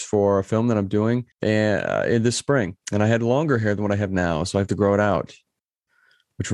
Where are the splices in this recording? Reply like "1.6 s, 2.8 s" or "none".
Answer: 1.3 s, 2.8 s